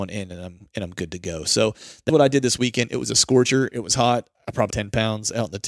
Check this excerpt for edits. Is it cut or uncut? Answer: cut